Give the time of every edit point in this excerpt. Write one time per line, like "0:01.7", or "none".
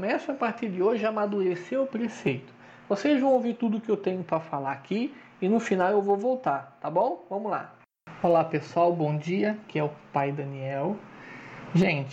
none